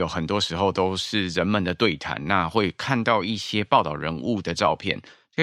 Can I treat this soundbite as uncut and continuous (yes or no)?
yes